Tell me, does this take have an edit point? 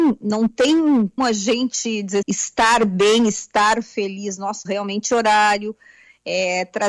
yes; 4 cuts; at 1.2 s, 2.2 s, 4.6 s, 5.1 s

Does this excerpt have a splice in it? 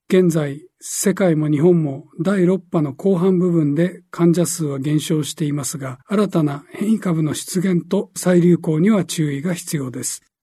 yes; 1 cut; at 6.0 s

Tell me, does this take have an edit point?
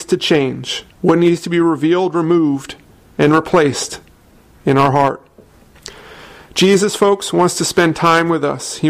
yes; 1 cut; at 0.9 s

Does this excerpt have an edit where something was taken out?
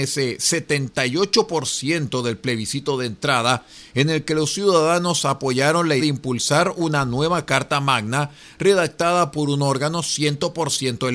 yes; 1 cut; at 6.0 s

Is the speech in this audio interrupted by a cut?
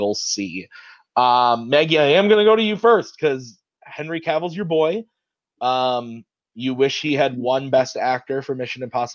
no; 0 cuts

